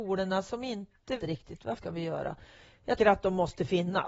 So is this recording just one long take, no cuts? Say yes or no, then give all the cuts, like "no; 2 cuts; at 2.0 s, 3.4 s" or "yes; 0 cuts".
no; 3 cuts; at 1.2 s, 1.8 s, 3.0 s